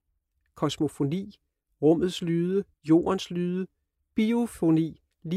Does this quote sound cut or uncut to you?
cut